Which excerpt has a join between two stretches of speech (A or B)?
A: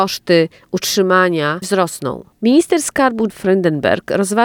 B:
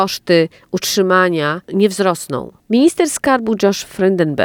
A